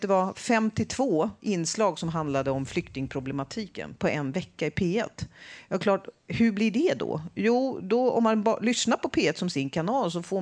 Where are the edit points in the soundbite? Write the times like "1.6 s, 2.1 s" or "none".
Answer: 1.4 s